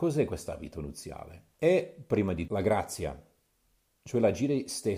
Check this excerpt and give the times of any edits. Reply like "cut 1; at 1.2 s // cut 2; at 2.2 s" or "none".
cut 1; at 1.5 s // cut 2; at 2.5 s